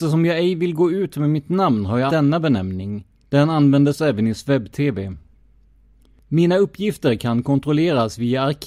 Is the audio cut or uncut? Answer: cut